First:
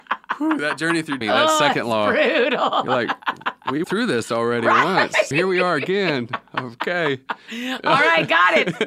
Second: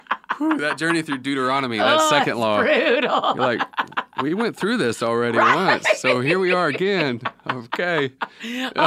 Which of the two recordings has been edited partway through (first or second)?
first